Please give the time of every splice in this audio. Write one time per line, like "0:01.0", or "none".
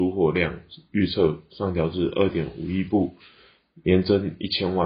none